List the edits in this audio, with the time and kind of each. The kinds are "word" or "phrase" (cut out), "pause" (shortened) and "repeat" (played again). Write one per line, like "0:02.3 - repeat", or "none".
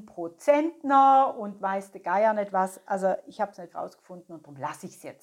0:03.7 - word